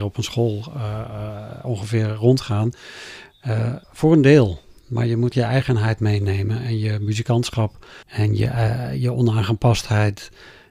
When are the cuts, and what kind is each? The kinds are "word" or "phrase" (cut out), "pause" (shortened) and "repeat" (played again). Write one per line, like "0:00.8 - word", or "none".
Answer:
0:03.8 - pause
0:05.3 - word
0:08.0 - pause